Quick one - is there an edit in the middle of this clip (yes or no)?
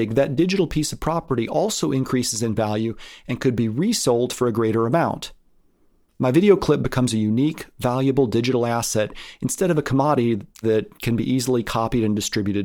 no